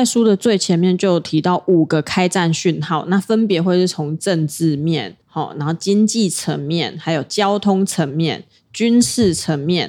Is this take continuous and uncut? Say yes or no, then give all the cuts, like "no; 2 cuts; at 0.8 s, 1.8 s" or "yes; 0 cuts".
no; 1 cut; at 5.2 s